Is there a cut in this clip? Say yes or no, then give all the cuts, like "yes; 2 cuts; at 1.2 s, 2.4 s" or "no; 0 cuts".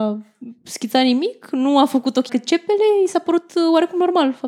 yes; 1 cut; at 2.3 s